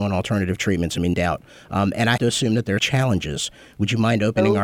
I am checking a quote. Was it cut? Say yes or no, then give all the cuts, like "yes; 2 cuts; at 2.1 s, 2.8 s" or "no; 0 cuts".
yes; 3 cuts; at 1.1 s, 2.2 s, 2.8 s